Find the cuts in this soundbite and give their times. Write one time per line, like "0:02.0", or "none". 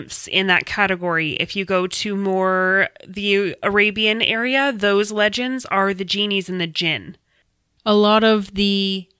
none